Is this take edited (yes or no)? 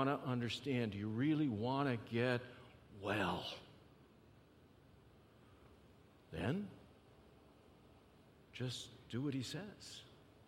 no